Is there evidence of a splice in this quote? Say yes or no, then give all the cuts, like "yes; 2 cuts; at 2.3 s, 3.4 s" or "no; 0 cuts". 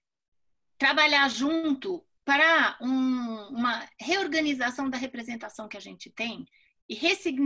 no; 0 cuts